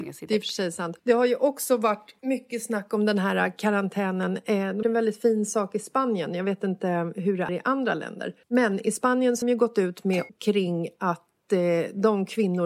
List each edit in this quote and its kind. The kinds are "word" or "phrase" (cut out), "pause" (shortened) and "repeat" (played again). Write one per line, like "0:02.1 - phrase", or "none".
0:01.0 - pause
0:02.2 - pause
0:04.8 - word
0:07.5 - word
0:08.4 - pause
0:09.4 - word
0:10.3 - word